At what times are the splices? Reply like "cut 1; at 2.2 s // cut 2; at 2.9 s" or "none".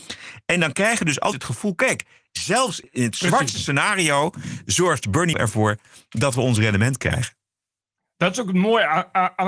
cut 1; at 1.3 s // cut 2; at 5.3 s